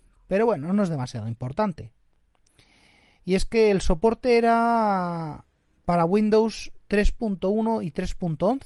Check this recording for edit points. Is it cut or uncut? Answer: uncut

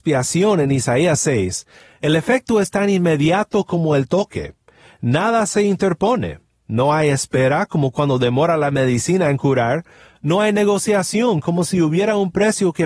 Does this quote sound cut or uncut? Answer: uncut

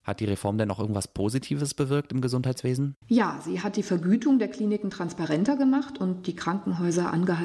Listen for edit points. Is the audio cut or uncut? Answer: uncut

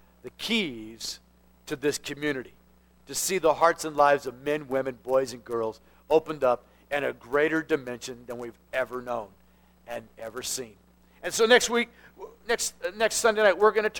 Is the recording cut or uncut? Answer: uncut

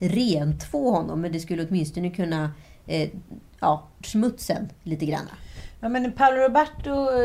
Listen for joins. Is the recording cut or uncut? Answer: cut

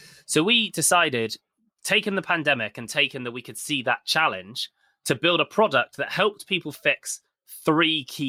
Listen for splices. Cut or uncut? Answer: uncut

